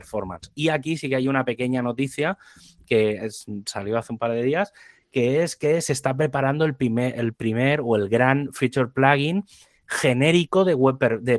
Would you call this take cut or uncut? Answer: uncut